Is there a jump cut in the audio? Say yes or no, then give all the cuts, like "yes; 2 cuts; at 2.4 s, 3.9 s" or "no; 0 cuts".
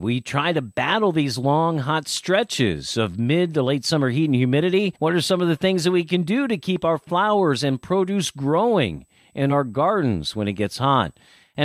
no; 0 cuts